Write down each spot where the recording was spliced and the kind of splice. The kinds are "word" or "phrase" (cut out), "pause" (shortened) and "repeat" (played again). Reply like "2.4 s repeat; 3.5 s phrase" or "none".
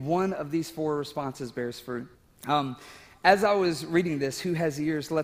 2.1 s pause